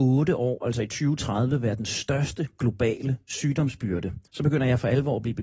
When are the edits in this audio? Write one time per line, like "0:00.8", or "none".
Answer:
0:04.3